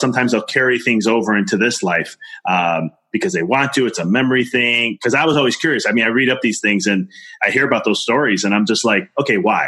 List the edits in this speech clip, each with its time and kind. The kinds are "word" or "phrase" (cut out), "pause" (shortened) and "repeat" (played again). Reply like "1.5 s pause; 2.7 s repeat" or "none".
none